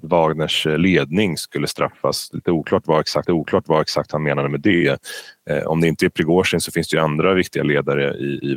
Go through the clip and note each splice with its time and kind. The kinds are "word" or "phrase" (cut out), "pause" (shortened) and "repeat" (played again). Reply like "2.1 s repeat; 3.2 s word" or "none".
3.3 s repeat

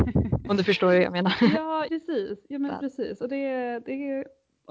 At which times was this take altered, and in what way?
1.9 s phrase

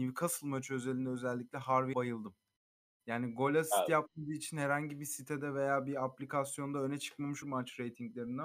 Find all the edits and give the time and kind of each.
1.9 s word; 7.4 s word

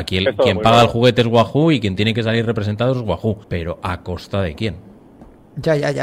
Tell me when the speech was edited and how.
3.4 s pause

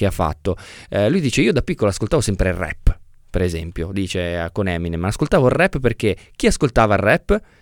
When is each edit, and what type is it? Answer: none

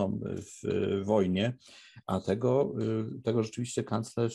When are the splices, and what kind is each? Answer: none

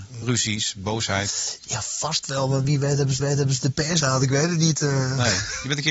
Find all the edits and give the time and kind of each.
3.2 s repeat; 4.0 s word

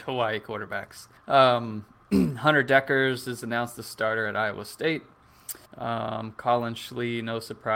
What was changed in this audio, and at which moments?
1.2 s pause; 5.7 s pause

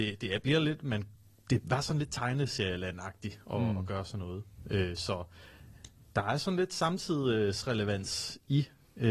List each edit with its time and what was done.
none

